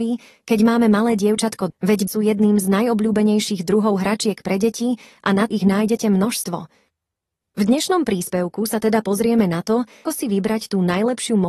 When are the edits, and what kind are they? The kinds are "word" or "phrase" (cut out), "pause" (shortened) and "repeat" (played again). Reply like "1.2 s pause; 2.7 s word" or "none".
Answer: 1.7 s word; 2.1 s word; 5.5 s word; 10.1 s word